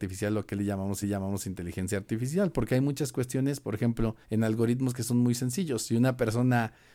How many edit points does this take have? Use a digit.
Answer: 2